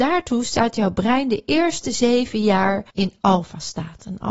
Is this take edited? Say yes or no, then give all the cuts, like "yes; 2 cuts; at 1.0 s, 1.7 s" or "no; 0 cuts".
yes; 1 cut; at 2.9 s